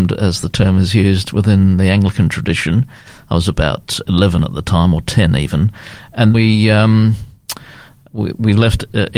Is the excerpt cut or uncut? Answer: cut